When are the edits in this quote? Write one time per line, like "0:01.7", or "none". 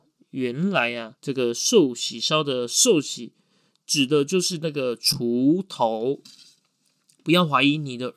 0:01.2